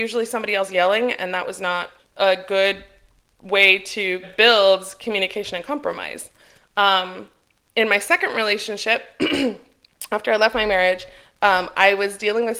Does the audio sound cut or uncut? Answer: cut